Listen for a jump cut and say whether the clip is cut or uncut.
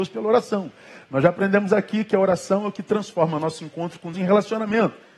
cut